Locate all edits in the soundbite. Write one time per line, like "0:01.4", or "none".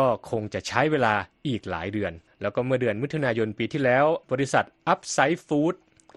0:02.3
0:04.2